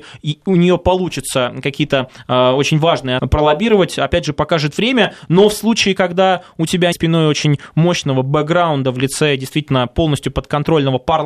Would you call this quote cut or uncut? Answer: cut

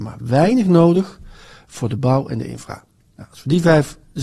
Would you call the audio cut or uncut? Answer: uncut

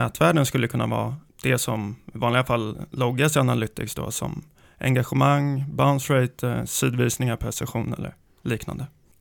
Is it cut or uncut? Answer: uncut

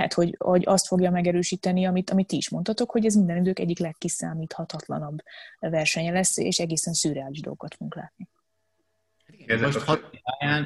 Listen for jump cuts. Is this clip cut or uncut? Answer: uncut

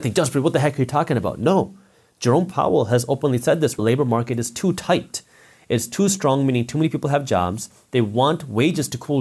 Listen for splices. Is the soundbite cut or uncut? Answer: cut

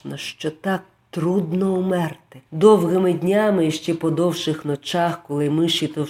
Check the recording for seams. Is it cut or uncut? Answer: cut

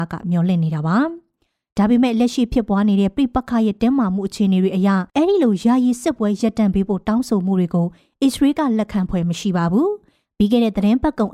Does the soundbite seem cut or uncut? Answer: cut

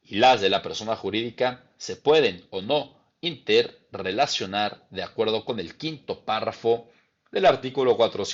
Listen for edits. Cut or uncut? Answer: uncut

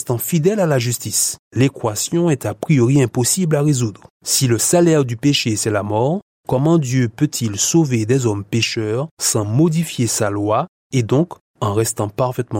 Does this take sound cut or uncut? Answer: cut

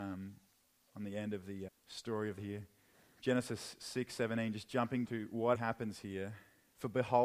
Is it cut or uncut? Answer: cut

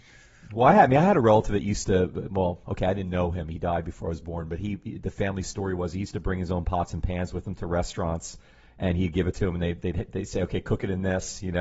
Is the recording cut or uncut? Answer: uncut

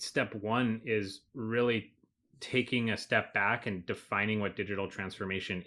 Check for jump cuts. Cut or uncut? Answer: uncut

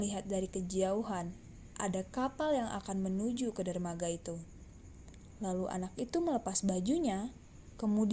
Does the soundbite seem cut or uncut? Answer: uncut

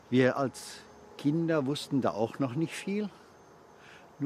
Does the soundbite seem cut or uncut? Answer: uncut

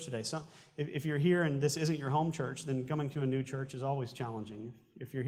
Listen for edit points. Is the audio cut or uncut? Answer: uncut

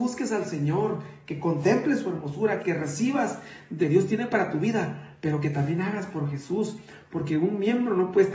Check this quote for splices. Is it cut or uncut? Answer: cut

